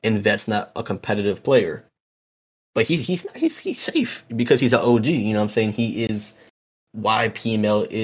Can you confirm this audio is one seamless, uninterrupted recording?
yes; 0 cuts

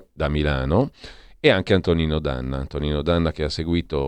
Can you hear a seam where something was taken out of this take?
no; 0 cuts

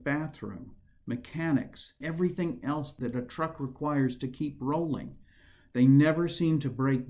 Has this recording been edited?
yes; 1 cut; at 2.0 s

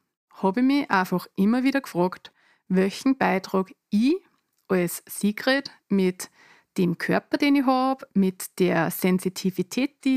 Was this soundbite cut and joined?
no; 0 cuts

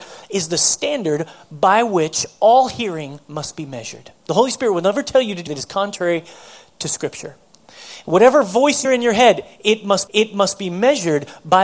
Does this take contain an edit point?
yes; 4 cuts; at 4.2 s, 5.5 s, 8.8 s, 10.1 s

